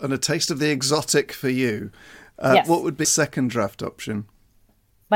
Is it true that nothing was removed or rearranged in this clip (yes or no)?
no